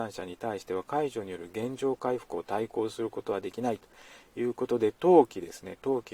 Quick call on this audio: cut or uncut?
cut